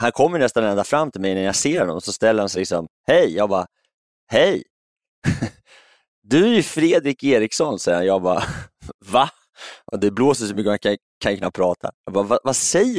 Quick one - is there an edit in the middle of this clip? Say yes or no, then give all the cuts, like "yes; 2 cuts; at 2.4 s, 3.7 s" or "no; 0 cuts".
no; 0 cuts